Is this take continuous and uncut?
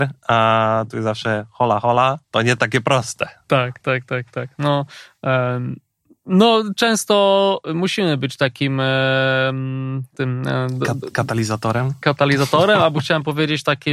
no; 1 cut; at 2.2 s

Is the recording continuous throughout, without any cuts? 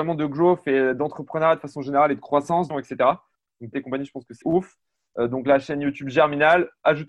no; 3 cuts; at 2.7 s, 3.7 s, 4.4 s

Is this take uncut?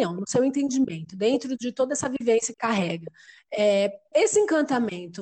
no; 2 cuts; at 2.5 s, 4.1 s

